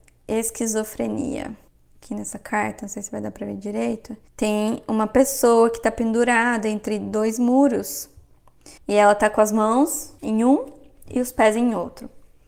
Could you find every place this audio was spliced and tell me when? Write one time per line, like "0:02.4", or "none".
0:01.7
0:04.3
0:08.8
0:10.2